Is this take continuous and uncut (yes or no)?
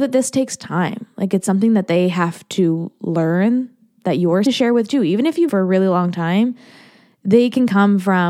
no